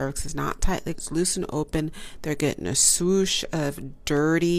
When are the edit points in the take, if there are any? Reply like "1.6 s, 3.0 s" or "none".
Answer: 0.9 s